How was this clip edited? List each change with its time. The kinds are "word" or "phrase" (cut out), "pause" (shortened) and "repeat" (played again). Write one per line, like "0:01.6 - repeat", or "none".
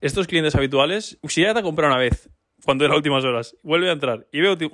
0:01.2 - word